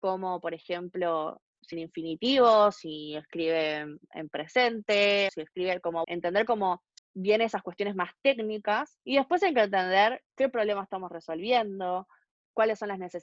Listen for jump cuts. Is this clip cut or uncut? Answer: cut